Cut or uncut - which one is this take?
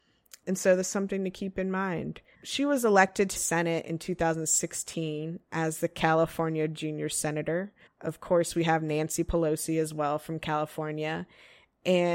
cut